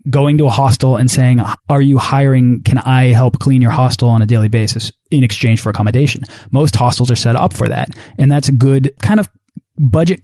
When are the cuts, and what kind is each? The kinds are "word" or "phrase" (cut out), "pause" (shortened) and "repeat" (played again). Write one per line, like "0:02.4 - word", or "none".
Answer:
0:01.6 - pause
0:09.0 - word

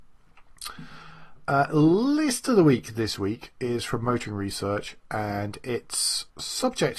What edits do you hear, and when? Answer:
none

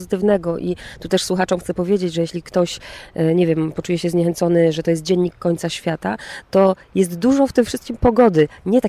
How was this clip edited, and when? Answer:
none

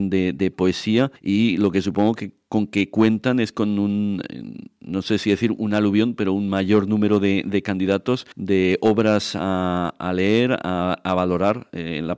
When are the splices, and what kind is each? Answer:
0:01.2 - pause
0:08.3 - pause

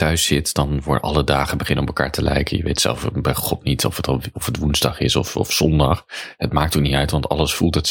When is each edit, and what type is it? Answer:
none

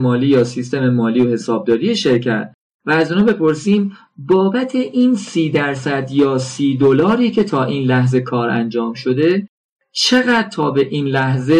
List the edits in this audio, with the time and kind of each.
none

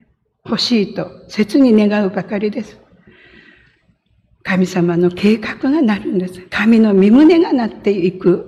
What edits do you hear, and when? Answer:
0:06.5 - pause

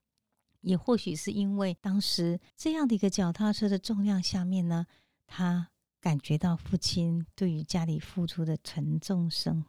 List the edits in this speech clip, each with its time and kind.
0:01.8 - pause
0:02.5 - pause

